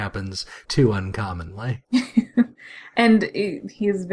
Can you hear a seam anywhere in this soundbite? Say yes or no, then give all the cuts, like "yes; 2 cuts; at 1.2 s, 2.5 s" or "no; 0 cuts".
no; 0 cuts